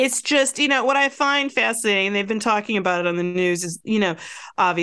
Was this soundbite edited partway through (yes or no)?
no